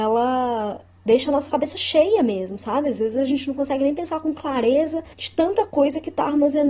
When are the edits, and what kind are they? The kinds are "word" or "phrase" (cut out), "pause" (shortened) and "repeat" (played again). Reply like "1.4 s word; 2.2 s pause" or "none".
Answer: 5.1 s pause